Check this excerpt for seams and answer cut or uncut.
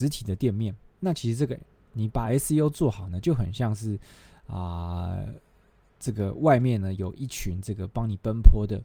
uncut